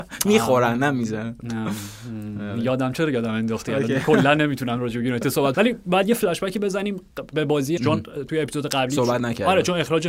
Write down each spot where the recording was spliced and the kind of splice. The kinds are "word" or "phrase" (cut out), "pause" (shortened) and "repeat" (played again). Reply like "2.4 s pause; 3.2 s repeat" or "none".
5.5 s word; 7.8 s word